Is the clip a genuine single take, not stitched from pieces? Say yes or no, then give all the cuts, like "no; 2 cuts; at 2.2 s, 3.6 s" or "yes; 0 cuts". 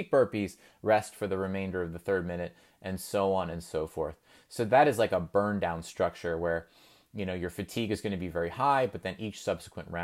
yes; 0 cuts